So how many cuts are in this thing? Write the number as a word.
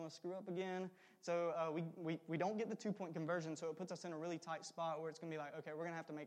zero